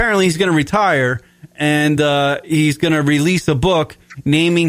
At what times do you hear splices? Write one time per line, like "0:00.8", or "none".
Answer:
none